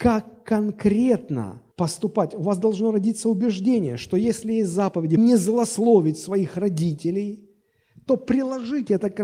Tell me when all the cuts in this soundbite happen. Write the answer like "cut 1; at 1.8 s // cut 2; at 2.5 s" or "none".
cut 1; at 1.7 s // cut 2; at 5.2 s